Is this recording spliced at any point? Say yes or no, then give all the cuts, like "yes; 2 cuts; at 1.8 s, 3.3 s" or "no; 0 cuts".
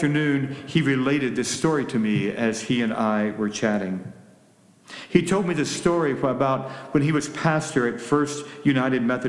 no; 0 cuts